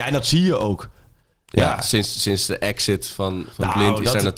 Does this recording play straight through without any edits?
yes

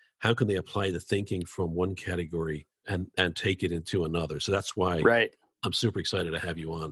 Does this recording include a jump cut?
yes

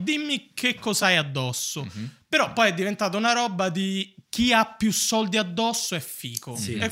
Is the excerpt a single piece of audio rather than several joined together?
yes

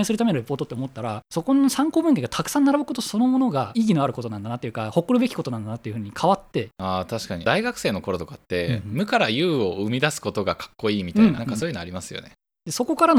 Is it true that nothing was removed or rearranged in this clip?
no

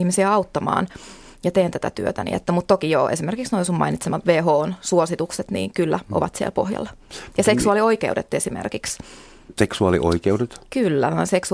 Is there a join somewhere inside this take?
no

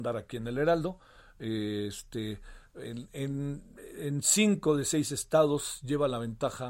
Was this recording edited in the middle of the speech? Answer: no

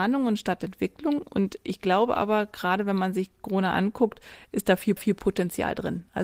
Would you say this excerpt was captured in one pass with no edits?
no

